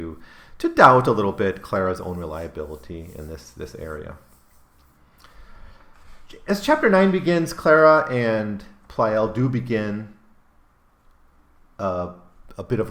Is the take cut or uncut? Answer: uncut